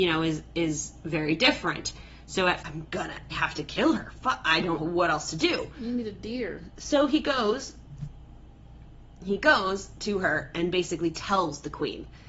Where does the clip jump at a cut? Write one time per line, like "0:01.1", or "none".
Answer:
0:02.6
0:03.3
0:04.8